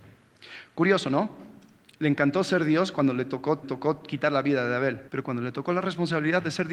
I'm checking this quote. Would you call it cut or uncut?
cut